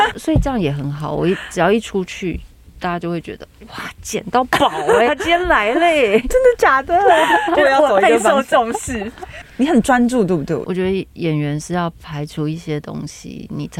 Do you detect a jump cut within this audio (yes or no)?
yes